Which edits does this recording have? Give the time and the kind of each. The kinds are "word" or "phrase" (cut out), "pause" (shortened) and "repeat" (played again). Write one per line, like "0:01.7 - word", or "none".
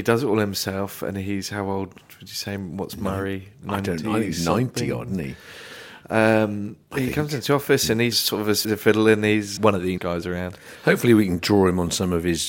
0:06.8 - pause
0:08.1 - word
0:08.6 - word
0:09.6 - word
0:10.0 - word